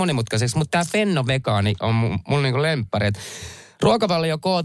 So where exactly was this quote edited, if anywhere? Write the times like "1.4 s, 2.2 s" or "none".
none